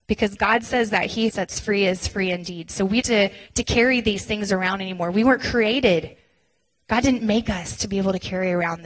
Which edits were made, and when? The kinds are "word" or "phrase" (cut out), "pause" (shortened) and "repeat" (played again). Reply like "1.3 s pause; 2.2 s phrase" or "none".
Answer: 1.3 s phrase; 3.0 s phrase